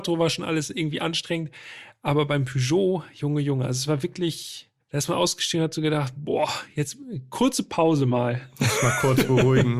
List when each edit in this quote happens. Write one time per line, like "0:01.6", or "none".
0:04.8

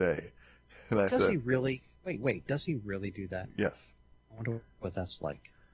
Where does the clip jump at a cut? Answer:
0:04.1

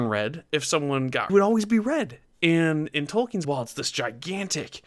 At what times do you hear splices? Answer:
0:01.3
0:03.4

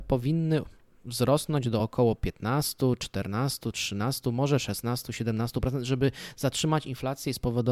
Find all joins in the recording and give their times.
none

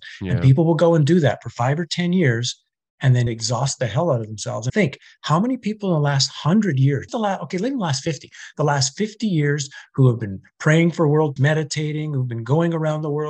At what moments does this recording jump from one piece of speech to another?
0:03.3
0:04.7
0:07.1
0:11.4

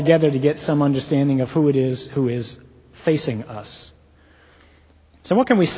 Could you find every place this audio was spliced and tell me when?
none

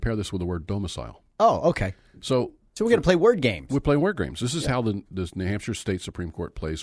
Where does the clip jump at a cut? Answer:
0:02.7

